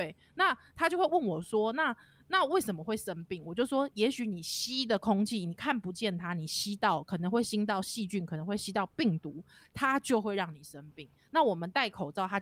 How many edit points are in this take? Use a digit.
0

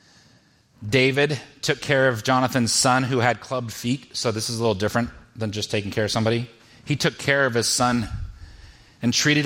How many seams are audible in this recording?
0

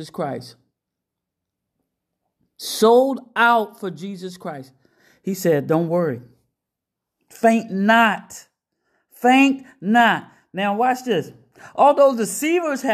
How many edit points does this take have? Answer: 0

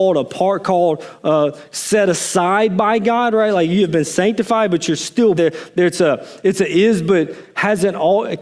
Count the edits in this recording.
1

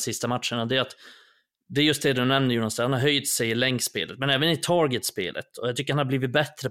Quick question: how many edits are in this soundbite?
0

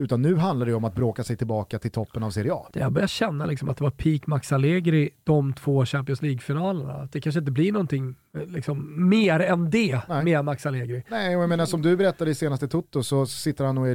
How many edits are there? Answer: 0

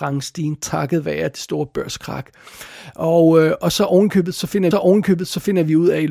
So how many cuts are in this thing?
1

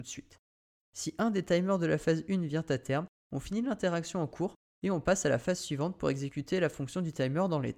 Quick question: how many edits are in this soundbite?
0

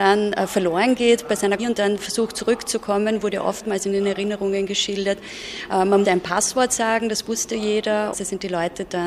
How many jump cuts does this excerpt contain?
3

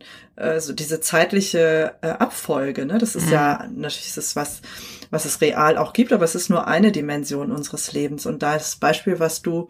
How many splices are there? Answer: 0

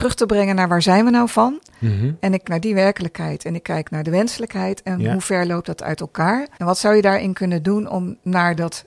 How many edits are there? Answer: 2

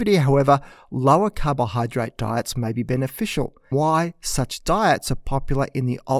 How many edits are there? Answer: 1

